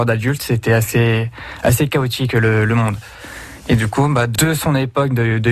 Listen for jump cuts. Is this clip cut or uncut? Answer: uncut